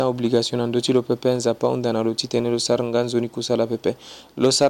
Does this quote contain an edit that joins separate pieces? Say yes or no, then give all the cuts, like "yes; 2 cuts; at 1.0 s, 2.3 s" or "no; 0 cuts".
no; 0 cuts